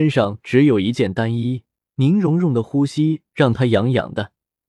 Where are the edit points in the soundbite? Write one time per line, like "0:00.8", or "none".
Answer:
0:01.8